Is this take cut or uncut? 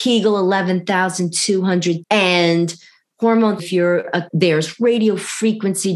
cut